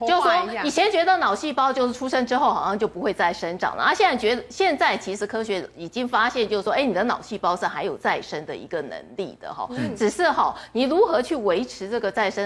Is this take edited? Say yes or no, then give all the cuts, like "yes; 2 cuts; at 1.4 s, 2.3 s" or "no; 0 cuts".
no; 0 cuts